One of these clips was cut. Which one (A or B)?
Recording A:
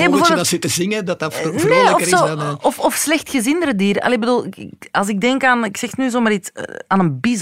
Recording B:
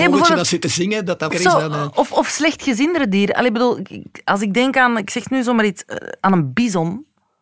B